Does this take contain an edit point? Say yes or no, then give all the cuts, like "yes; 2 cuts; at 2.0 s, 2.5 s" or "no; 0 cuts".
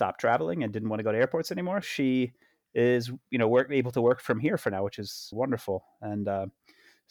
yes; 2 cuts; at 1.8 s, 5.3 s